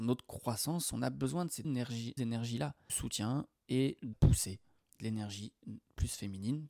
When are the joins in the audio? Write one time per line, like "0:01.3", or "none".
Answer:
0:01.6
0:02.2
0:02.9
0:04.1
0:04.8

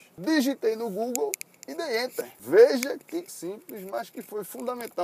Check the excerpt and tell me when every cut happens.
0:03.3

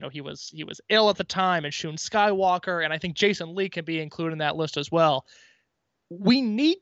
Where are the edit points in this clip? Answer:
none

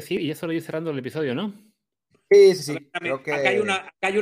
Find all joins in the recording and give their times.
none

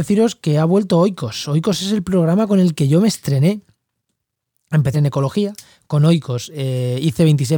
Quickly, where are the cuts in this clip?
0:04.9

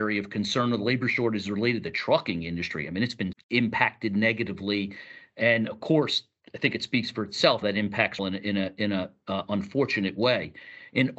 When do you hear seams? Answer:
0:03.3
0:07.6
0:08.2

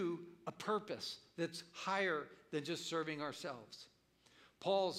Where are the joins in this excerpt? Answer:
none

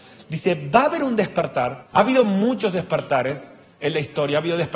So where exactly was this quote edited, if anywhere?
0:01.9

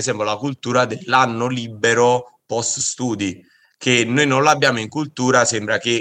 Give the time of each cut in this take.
none

